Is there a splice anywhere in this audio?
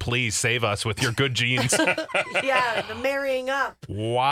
no; 0 cuts

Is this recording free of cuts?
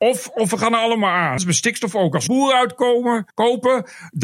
no; 3 cuts; at 1.4 s, 2.3 s, 3.3 s

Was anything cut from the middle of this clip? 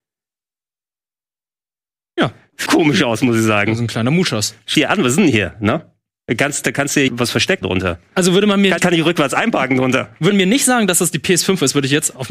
yes; 6 cuts; at 2.7 s, 4.7 s, 7.1 s, 7.6 s, 8.8 s, 10.3 s

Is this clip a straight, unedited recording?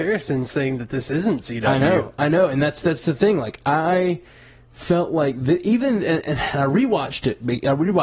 yes; 0 cuts

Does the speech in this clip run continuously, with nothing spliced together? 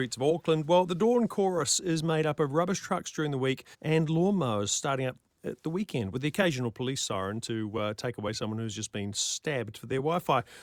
no; 1 cut; at 3.7 s

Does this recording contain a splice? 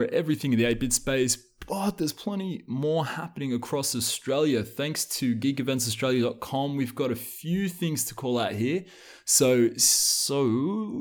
no; 0 cuts

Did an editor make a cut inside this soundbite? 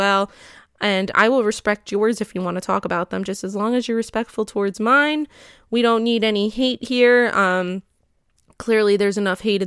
no; 0 cuts

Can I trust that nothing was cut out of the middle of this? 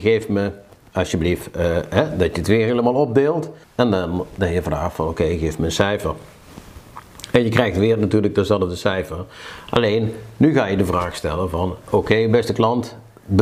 no; 1 cut; at 3.6 s

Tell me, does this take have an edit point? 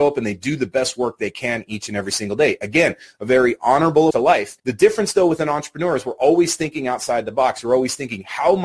yes; 2 cuts; at 4.1 s, 4.6 s

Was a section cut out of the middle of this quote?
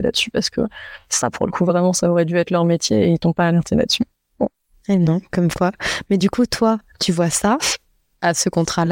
no; 0 cuts

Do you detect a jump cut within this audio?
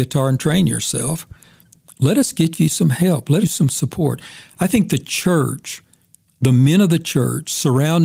yes; 1 cut; at 3.4 s

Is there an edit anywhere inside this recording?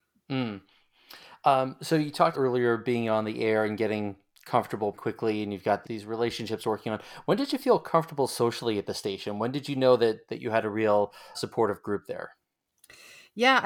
yes; 4 cuts; at 2.3 s, 4.9 s, 5.8 s, 11.3 s

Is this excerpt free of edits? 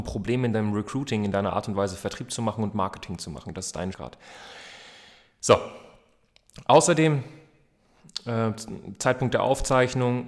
no; 1 cut; at 3.9 s

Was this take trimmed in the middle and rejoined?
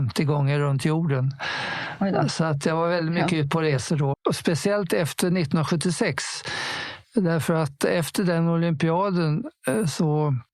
yes; 2 cuts; at 4.1 s, 7.0 s

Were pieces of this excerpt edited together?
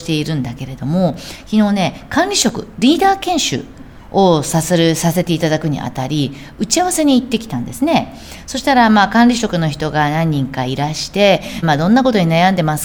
yes; 1 cut; at 11.6 s

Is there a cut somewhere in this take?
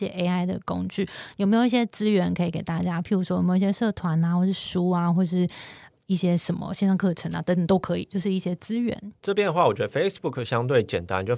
no; 0 cuts

